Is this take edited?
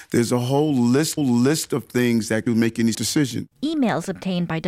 yes; 3 cuts; at 1.2 s, 2.5 s, 2.9 s

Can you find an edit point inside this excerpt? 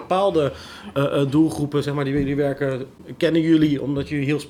no; 0 cuts

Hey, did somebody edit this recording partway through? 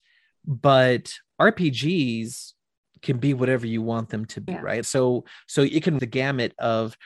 yes; 3 cuts; at 4.5 s, 4.8 s, 6.0 s

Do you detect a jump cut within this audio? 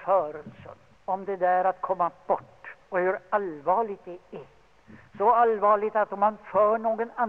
yes; 2 cuts; at 0.9 s, 2.8 s

